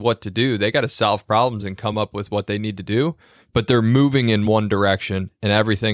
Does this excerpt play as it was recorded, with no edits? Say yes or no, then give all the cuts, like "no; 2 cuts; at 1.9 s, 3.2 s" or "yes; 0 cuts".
yes; 0 cuts